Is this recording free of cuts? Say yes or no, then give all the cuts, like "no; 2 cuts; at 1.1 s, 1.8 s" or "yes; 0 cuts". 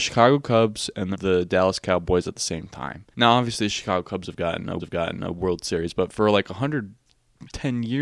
no; 3 cuts; at 1.1 s, 3.1 s, 4.8 s